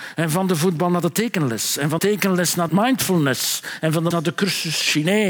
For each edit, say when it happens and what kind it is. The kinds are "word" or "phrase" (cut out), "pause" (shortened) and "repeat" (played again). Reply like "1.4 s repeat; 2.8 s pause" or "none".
2.0 s word; 2.7 s word; 4.1 s word

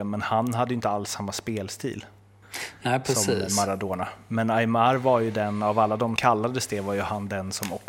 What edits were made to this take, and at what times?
6.2 s word

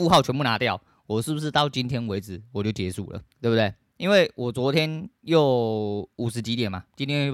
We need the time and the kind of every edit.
3.3 s pause

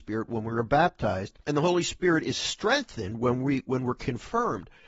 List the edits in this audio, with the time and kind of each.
1.4 s pause

